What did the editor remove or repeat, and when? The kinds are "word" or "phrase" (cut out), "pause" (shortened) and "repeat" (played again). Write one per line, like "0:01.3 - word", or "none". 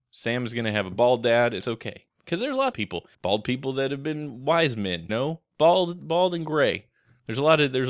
0:01.6 - word
0:02.7 - phrase
0:03.1 - pause
0:05.1 - word